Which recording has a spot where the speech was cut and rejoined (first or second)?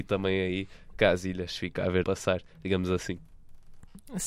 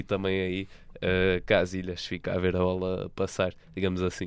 first